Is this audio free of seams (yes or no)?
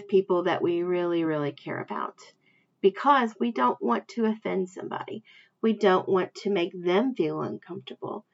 yes